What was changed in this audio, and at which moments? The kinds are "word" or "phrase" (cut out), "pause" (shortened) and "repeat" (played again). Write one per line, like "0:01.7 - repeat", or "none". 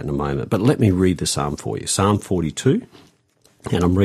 none